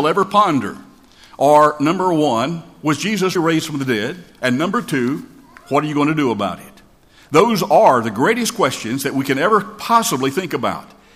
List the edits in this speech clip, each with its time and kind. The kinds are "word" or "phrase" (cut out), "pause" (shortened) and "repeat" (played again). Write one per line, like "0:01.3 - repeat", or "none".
0:03.4 - word

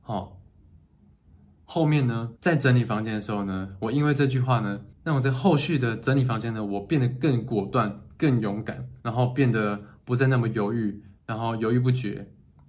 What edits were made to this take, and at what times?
0:02.4 - pause
0:04.9 - pause
0:09.0 - pause
0:11.2 - pause

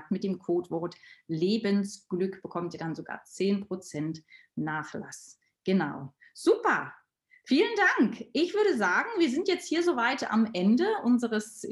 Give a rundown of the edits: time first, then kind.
none

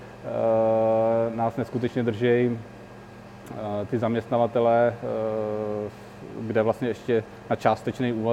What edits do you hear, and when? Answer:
none

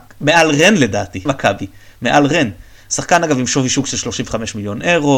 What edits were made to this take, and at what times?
0:01.3 - phrase

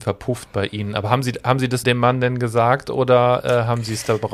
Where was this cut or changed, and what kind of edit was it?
0:01.8 - word

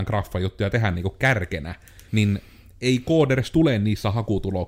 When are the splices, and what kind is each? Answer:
0:02.1 - pause

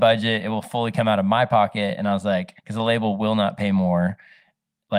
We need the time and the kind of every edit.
0:02.6 - pause

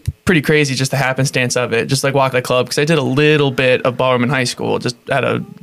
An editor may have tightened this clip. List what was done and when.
0:02.3 - word

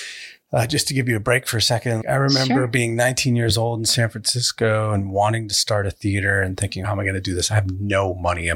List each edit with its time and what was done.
0:02.0 - word
0:06.8 - phrase

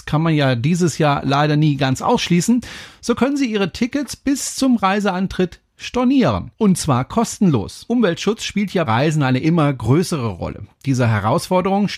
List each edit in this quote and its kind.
0:06.5 - pause
0:08.9 - word

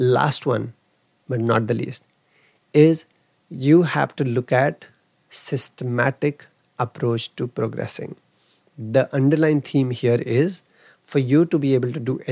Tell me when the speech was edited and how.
none

